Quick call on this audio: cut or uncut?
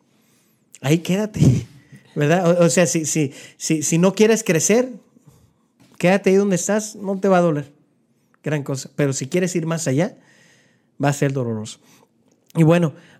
uncut